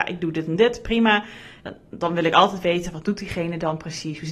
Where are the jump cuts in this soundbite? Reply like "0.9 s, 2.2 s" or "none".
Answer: none